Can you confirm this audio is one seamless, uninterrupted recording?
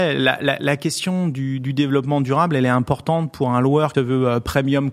no; 1 cut; at 3.9 s

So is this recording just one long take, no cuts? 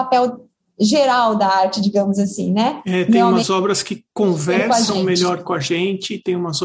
yes; 0 cuts

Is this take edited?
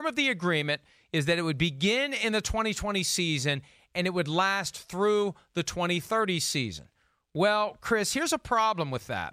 no; 0 cuts

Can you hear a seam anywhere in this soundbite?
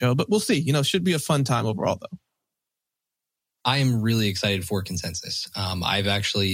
no; 0 cuts

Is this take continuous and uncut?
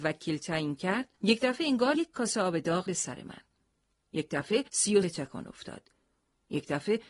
no; 5 cuts; at 1.1 s, 1.9 s, 2.9 s, 4.7 s, 5.0 s

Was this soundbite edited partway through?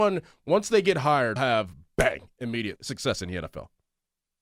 yes; 2 cuts; at 1.4 s, 2.8 s

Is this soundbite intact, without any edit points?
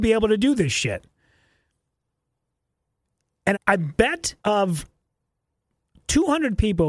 no; 2 cuts; at 3.5 s, 4.4 s

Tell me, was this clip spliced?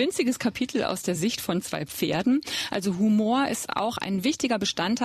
no; 0 cuts

